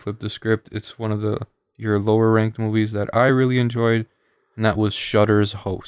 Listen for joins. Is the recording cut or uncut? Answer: uncut